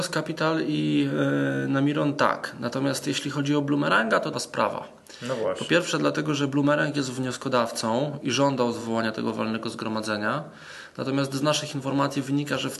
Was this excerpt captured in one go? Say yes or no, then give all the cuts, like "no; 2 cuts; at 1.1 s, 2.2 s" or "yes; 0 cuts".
no; 1 cut; at 4.3 s